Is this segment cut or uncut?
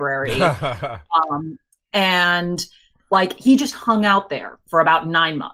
uncut